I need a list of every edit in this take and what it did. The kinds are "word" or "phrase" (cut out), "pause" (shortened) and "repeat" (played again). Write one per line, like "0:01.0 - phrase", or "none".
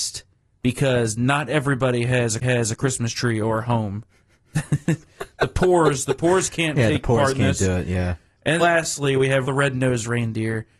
0:02.4 - repeat
0:04.1 - pause
0:08.6 - word
0:09.4 - word